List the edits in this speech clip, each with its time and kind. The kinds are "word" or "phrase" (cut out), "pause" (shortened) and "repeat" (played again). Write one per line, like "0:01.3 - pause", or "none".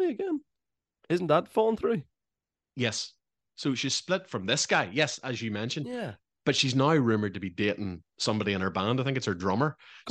none